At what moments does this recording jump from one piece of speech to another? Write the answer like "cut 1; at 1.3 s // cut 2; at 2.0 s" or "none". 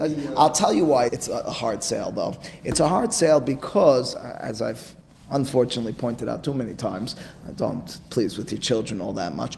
cut 1; at 1.1 s